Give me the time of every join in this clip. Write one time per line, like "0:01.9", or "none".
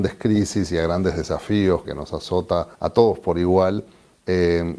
0:01.9
0:02.7

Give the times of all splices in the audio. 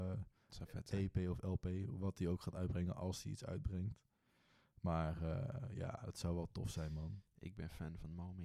none

